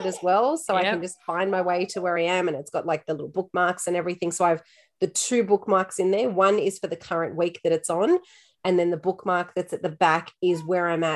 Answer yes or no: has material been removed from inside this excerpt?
no